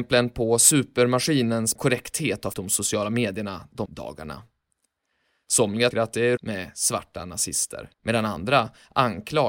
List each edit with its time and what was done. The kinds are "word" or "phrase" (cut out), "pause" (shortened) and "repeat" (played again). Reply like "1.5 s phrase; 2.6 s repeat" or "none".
1.8 s word; 2.5 s word; 3.9 s word; 5.9 s word; 6.4 s word; 7.9 s pause